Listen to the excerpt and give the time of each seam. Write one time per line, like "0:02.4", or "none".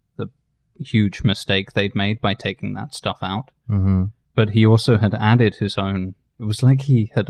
none